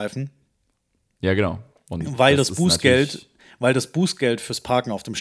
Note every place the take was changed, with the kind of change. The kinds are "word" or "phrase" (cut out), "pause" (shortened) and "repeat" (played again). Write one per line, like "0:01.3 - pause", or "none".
none

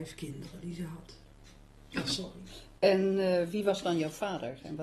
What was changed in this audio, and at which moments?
none

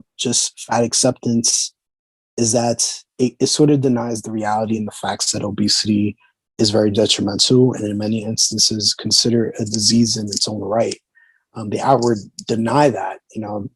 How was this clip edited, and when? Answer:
none

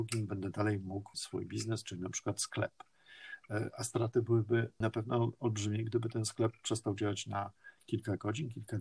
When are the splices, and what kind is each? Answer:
0:01.1 - word

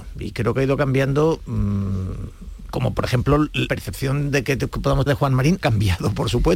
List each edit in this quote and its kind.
0:02.7 - word
0:03.7 - word
0:05.1 - word
0:05.6 - word

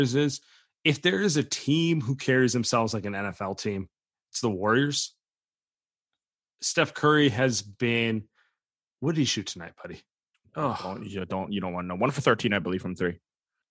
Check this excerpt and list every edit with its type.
none

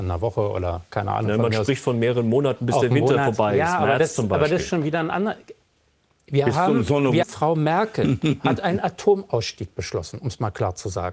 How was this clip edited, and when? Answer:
0:07.2 - word

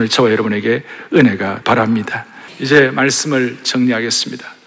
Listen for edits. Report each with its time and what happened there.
0:01.6 - word
0:02.5 - pause

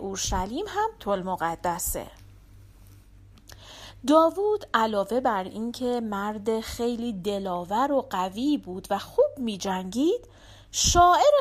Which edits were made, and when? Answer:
0:01.0 - word

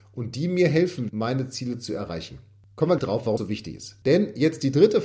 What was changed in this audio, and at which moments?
0:01.1 - word
0:03.0 - word
0:03.4 - word

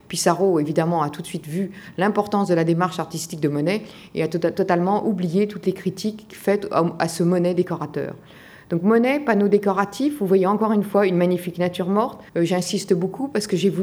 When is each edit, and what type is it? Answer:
0:12.3 - pause

